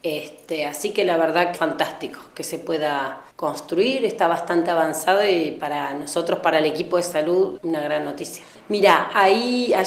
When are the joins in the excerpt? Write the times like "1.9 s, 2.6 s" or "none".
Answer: 1.5 s, 3.3 s, 7.6 s